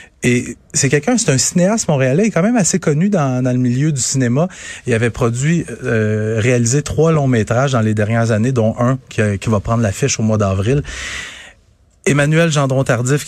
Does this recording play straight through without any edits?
yes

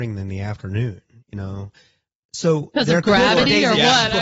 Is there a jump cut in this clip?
no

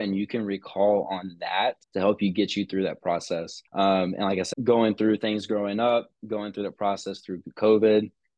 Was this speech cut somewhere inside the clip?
yes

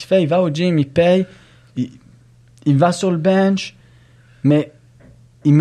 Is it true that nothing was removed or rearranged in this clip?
yes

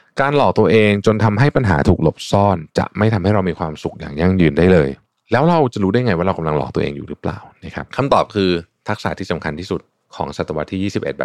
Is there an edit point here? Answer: no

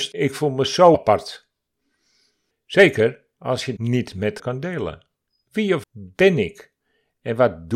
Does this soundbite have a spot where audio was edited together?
yes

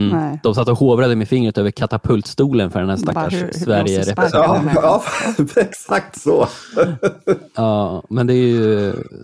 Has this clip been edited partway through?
yes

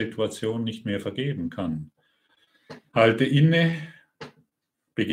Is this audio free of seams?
no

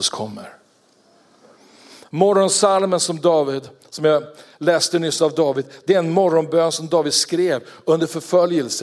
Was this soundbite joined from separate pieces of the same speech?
no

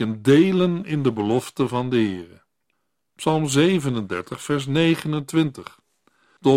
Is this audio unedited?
yes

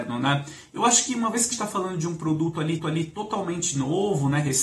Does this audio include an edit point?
yes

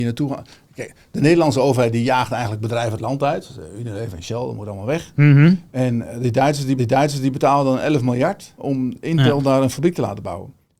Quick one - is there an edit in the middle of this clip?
yes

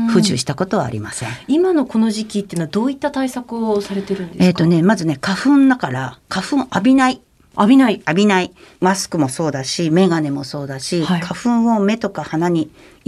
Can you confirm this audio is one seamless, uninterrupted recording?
yes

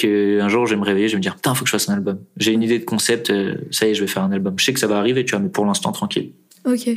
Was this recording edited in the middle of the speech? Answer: no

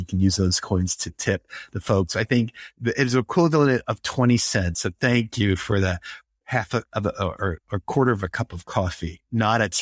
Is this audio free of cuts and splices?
yes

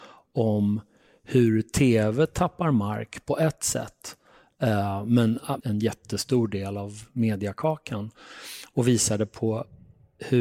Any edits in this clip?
yes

